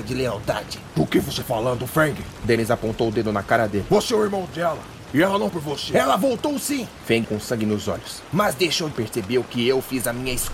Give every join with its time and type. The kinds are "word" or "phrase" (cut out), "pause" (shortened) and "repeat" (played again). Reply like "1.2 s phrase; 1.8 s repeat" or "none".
1.4 s word; 5.5 s word; 7.2 s word; 8.9 s phrase